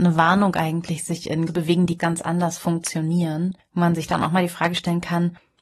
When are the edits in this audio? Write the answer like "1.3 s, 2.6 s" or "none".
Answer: 1.5 s, 2.0 s